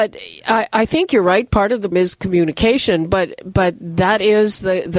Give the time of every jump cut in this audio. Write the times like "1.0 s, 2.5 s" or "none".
1.9 s